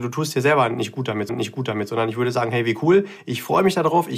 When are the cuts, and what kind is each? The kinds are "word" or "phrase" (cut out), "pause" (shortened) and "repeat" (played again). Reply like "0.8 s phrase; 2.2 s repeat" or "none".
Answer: 1.3 s repeat